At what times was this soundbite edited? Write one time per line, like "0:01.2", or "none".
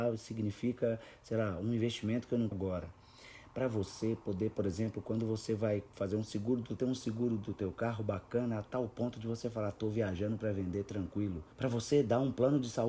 0:02.5
0:06.8
0:11.5